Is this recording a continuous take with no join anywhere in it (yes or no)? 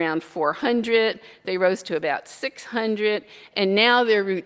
yes